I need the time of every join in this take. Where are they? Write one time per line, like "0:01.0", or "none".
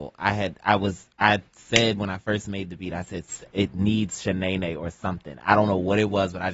none